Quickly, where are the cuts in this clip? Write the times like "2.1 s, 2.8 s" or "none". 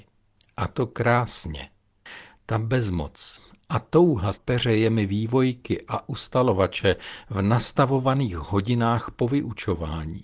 4.3 s